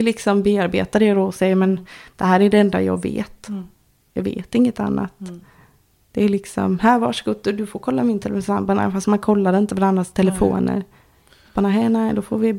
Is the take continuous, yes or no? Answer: yes